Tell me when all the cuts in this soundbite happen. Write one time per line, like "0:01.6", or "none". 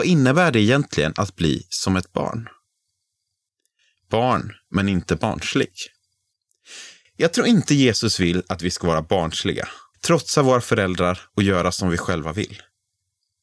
none